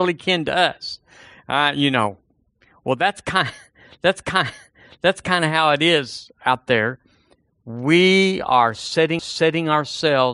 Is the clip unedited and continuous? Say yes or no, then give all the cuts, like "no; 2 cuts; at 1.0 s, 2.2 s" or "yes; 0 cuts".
no; 2 cuts; at 4.2 s, 9.2 s